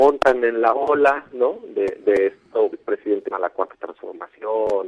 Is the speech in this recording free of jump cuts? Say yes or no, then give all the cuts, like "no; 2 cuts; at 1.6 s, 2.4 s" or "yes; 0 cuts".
no; 3 cuts; at 2.0 s, 2.7 s, 3.3 s